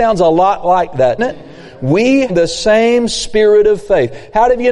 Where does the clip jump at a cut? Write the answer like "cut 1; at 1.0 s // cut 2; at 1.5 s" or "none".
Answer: cut 1; at 1.2 s // cut 2; at 2.3 s